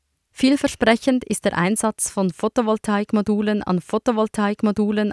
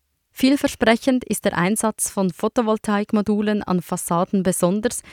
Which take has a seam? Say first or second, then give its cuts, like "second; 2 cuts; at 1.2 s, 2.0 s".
first; 1 cut; at 3.8 s